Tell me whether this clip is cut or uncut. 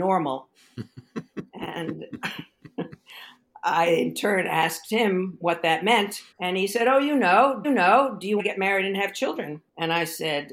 cut